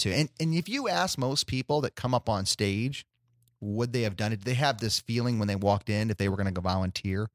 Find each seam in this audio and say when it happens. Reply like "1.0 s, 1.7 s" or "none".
none